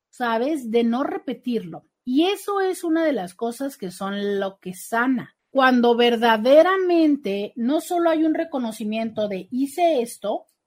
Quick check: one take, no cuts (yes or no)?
yes